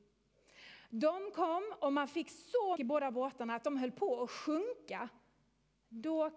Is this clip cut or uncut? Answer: cut